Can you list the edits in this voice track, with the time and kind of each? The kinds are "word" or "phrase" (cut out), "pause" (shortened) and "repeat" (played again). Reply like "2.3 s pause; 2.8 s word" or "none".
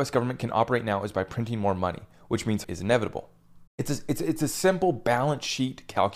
2.6 s word; 3.7 s pause